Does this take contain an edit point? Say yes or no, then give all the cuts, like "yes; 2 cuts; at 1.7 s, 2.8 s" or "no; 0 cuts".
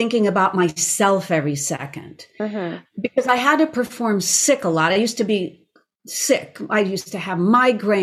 no; 0 cuts